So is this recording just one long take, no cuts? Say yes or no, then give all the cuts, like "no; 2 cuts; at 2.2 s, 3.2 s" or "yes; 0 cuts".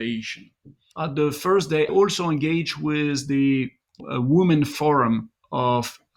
no; 2 cuts; at 1.9 s, 4.0 s